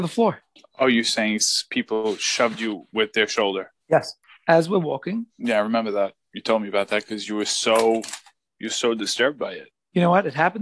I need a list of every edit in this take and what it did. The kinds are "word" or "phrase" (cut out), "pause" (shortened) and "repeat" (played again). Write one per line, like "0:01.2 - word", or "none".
0:03.8 - pause
0:05.3 - pause